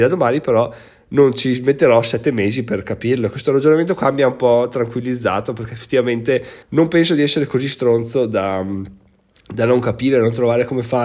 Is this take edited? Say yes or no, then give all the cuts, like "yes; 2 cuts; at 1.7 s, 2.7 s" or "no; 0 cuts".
yes; 1 cut; at 6.6 s